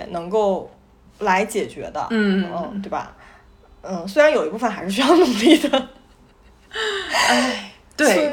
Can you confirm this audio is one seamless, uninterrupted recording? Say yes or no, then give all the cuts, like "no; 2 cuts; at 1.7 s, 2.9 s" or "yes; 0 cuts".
yes; 0 cuts